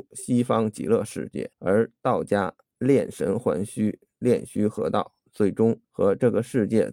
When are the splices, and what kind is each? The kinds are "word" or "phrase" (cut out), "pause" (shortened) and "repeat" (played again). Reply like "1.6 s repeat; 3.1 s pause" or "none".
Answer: 1.5 s pause; 5.8 s pause